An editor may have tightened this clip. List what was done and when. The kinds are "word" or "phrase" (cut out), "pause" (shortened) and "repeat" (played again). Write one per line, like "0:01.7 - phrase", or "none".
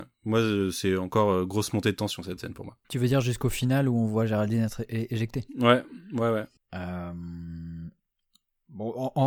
0:02.8 - pause
0:06.6 - pause